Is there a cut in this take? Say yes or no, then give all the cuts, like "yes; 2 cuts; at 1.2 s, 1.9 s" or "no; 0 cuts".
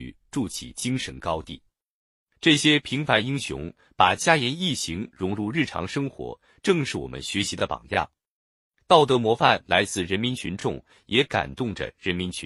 no; 0 cuts